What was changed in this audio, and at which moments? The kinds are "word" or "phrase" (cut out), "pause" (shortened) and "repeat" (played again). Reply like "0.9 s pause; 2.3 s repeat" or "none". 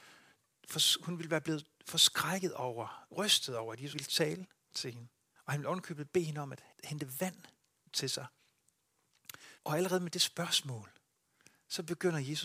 3.9 s word; 5.4 s pause; 6.7 s pause; 7.9 s word; 9.6 s pause